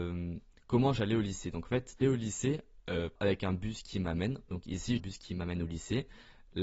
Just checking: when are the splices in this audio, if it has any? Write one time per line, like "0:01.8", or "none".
0:02.0
0:03.2
0:05.0